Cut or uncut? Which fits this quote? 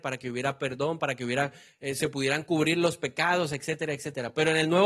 uncut